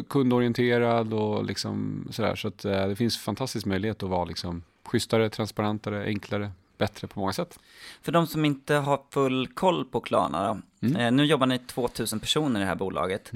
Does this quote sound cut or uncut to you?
uncut